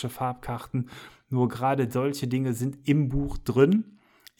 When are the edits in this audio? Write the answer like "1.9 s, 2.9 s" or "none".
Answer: none

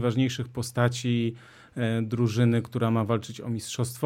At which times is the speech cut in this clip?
none

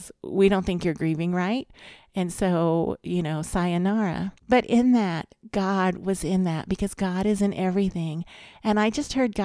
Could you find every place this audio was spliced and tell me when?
4.4 s

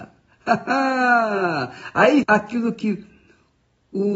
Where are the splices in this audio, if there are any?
2.2 s

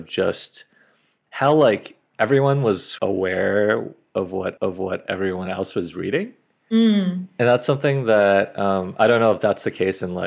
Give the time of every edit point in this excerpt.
4.6 s

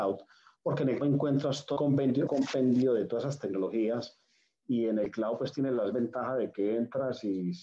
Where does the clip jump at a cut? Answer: 1.0 s, 1.8 s, 2.3 s, 5.9 s

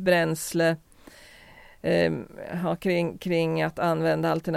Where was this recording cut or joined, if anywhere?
none

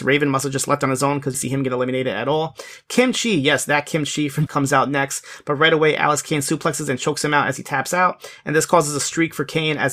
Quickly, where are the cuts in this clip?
1.3 s, 4.5 s

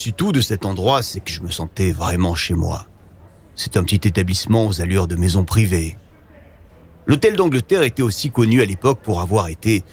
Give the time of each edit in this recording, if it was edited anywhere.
none

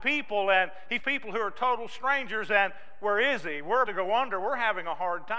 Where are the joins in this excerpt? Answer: 1.0 s, 3.8 s

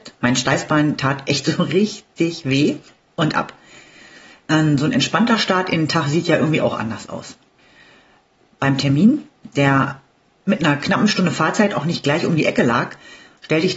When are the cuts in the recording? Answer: 10.2 s

